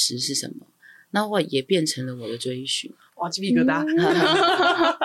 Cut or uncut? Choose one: uncut